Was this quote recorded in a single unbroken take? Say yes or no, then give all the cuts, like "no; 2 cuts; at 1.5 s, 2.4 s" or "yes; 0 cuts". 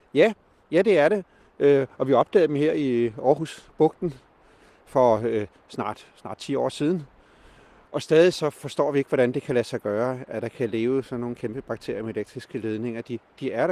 yes; 0 cuts